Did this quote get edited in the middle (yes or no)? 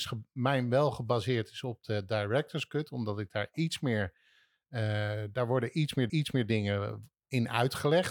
yes